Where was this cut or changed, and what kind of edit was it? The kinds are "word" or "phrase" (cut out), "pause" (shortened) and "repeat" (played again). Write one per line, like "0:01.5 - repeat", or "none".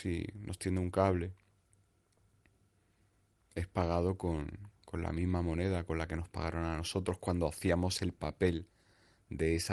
none